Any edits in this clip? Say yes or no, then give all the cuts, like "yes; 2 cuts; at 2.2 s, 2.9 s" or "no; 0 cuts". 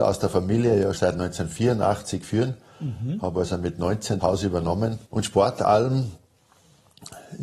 yes; 3 cuts; at 1.0 s, 4.2 s, 5.0 s